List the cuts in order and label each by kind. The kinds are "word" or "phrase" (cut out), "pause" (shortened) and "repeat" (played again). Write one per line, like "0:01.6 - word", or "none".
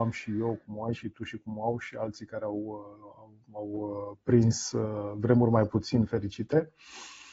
none